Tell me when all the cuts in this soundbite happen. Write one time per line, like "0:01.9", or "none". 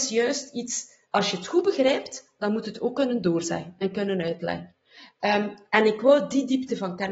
0:01.1